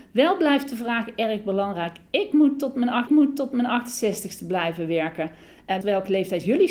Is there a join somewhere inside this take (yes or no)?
yes